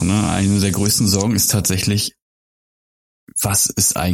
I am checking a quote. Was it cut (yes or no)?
no